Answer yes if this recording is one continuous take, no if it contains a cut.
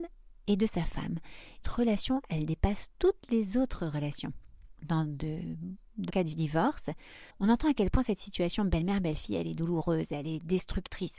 no